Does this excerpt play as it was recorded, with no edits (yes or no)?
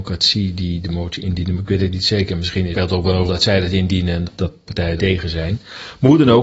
no